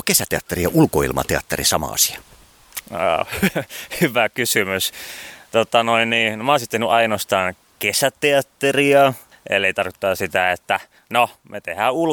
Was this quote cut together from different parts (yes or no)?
no